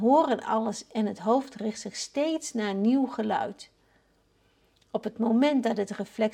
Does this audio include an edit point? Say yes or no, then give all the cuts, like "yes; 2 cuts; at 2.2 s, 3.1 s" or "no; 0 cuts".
no; 0 cuts